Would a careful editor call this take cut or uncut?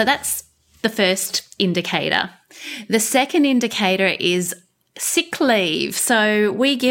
uncut